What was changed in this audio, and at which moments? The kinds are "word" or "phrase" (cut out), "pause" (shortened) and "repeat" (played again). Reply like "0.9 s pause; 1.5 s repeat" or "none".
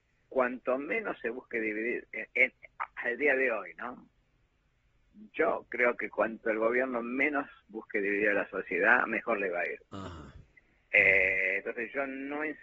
none